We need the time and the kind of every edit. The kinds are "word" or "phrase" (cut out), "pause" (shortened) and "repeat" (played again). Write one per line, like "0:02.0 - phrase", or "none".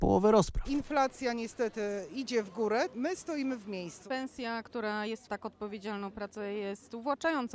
0:05.3 - phrase